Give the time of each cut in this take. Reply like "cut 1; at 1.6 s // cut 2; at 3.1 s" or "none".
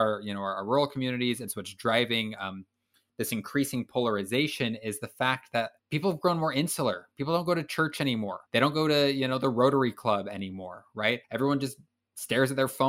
cut 1; at 5.8 s // cut 2; at 8.5 s // cut 3; at 11.2 s